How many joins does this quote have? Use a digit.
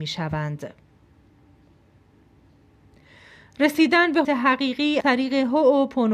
2